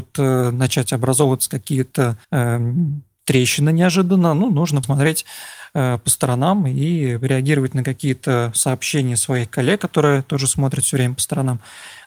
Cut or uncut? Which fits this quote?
cut